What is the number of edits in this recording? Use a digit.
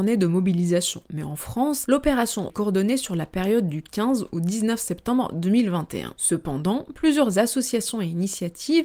1